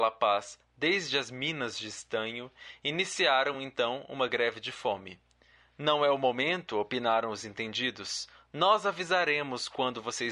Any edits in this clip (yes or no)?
no